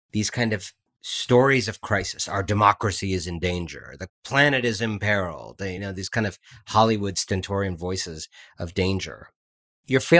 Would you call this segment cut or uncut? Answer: uncut